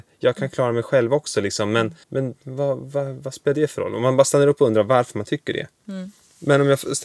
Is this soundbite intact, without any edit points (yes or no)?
no